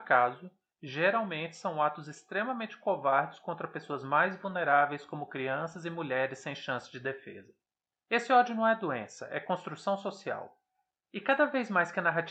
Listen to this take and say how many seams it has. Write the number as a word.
zero